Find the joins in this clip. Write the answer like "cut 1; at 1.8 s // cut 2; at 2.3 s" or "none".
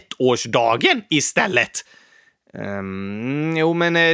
none